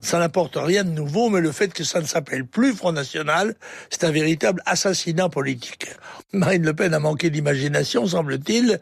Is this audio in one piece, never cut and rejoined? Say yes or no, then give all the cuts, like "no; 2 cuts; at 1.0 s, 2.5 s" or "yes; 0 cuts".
yes; 0 cuts